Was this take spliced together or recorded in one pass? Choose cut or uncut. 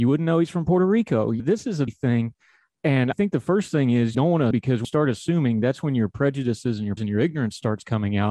cut